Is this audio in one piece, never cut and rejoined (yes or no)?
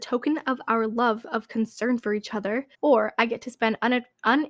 no